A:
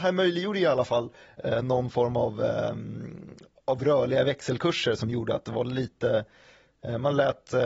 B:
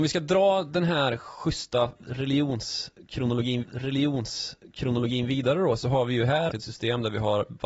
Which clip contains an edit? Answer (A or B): B